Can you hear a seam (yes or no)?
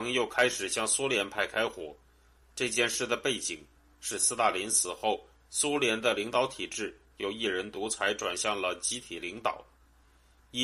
no